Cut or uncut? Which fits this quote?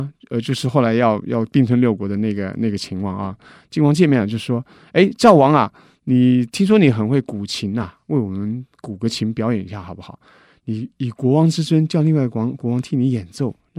uncut